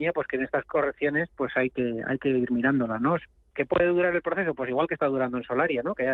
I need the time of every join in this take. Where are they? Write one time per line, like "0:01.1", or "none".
none